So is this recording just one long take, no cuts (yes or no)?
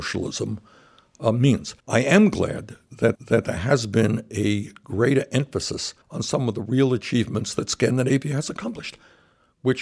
no